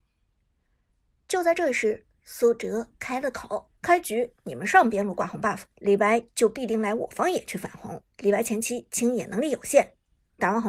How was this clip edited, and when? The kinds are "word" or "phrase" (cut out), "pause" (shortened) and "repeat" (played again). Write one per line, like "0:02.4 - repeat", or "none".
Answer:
0:03.8 - pause
0:05.7 - pause
0:08.1 - pause